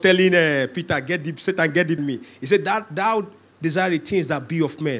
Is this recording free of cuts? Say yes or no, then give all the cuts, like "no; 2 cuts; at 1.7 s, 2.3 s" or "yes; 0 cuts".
no; 1 cut; at 2.0 s